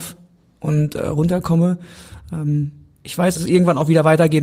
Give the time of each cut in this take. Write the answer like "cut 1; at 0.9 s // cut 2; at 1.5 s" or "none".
cut 1; at 3.3 s